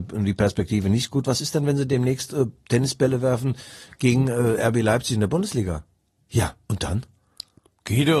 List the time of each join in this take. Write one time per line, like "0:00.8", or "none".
none